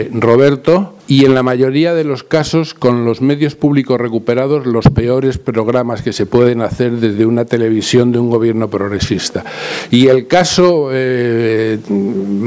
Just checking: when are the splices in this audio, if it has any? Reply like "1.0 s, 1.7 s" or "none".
1.0 s